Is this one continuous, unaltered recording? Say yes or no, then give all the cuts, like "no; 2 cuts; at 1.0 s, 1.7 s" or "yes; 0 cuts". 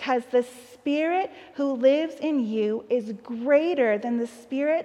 yes; 0 cuts